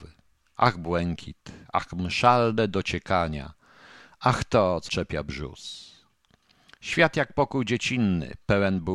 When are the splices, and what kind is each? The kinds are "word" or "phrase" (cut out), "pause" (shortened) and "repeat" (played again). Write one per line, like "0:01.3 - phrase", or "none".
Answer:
0:04.9 - word